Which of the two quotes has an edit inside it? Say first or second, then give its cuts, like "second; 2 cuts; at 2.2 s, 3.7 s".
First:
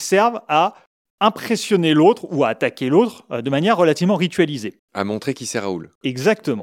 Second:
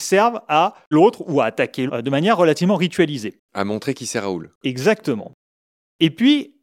second; 2 cuts; at 0.9 s, 1.9 s